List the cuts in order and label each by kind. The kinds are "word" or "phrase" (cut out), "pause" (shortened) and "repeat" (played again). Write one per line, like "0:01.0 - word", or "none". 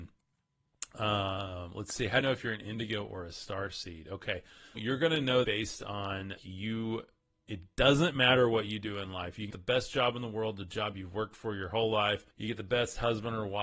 0:02.2 - word
0:04.7 - word
0:05.4 - word
0:06.4 - word
0:09.5 - word
0:12.3 - pause